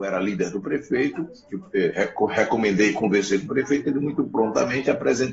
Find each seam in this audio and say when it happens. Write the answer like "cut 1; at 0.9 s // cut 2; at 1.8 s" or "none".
none